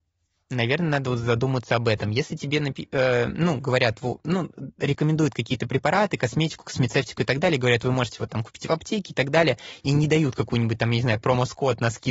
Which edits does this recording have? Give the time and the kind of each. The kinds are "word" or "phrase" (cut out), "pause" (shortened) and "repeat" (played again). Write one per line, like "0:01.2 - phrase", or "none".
none